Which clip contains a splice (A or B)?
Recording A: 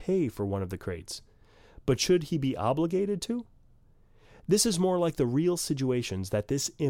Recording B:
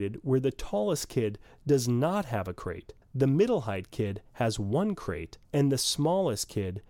B